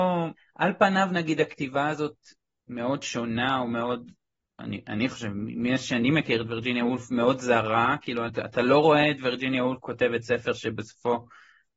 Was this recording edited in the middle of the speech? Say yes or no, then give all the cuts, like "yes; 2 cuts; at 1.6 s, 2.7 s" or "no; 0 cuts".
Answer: no; 0 cuts